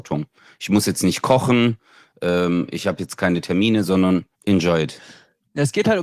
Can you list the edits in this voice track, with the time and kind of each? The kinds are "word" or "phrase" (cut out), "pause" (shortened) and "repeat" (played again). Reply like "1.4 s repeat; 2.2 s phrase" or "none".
4.3 s pause